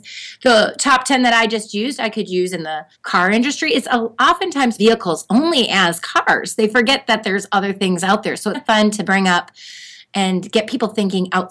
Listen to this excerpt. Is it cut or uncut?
cut